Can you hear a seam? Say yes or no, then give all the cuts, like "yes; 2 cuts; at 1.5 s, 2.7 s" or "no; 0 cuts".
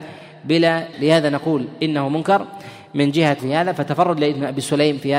yes; 2 cuts; at 0.9 s, 3.4 s